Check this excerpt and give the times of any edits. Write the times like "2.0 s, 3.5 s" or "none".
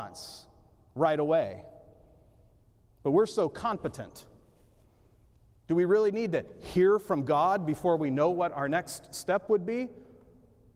none